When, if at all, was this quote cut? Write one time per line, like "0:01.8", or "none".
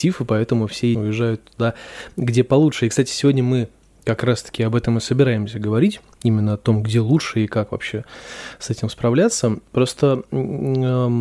0:00.9